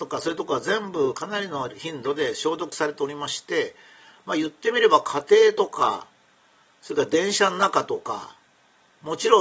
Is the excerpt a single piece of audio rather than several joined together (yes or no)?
yes